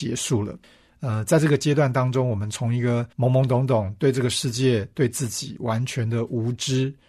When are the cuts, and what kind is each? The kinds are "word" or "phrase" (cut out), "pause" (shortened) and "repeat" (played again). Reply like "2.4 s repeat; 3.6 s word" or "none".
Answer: 3.1 s pause